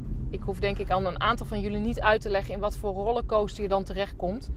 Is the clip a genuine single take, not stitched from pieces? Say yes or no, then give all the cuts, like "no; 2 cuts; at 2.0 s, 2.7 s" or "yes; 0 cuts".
yes; 0 cuts